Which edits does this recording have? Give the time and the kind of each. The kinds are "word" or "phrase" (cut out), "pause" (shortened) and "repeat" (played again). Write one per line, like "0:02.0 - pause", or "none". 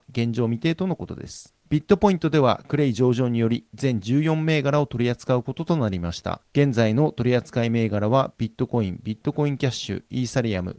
none